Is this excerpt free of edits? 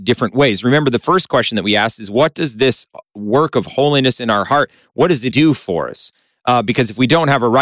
no; 1 cut; at 5.3 s

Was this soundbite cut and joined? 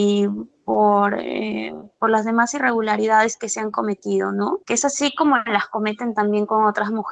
yes; 1 cut; at 4.6 s

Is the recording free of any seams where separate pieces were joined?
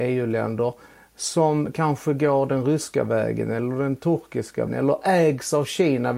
no; 1 cut; at 4.7 s

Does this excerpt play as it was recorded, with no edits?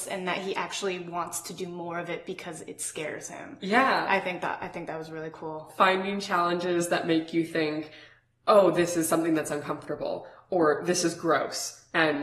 yes; 0 cuts

